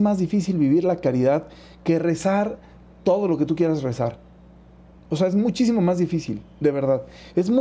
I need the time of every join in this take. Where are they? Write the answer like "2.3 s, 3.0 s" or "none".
none